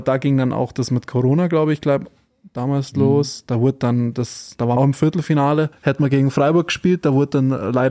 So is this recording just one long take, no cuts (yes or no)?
no